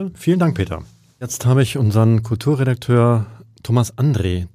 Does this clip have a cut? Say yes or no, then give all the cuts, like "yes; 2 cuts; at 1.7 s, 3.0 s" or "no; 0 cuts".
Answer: no; 0 cuts